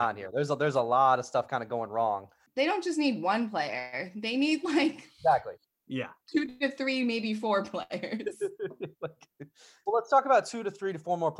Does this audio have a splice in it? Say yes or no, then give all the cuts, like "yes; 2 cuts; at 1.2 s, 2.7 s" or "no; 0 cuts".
no; 0 cuts